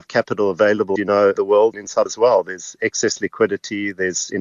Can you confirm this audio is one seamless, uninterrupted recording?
no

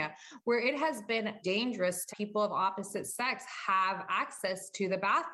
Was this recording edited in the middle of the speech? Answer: yes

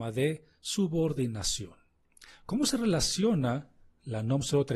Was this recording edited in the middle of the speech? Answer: no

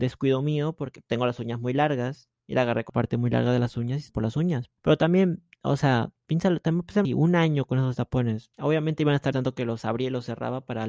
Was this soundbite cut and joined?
yes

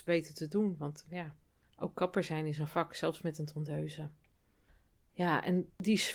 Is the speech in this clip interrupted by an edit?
no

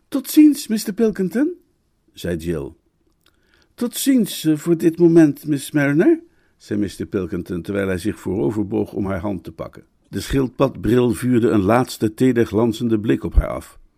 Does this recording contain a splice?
no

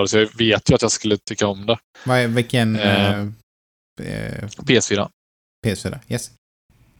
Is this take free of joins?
yes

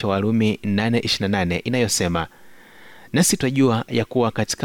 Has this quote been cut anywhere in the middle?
no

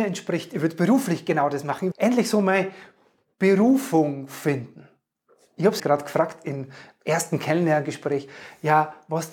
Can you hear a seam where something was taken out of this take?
yes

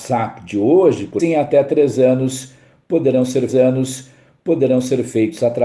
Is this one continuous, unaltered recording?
no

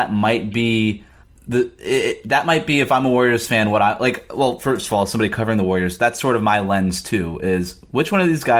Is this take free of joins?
no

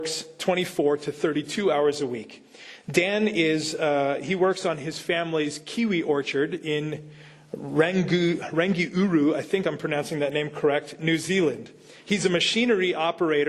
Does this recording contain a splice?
no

